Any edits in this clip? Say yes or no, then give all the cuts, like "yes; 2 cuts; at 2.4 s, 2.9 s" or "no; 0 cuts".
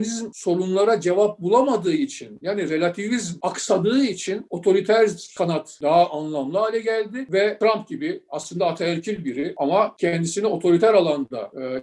no; 0 cuts